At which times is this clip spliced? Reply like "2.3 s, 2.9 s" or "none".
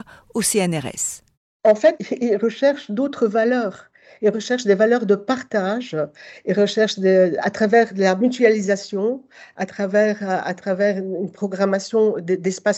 none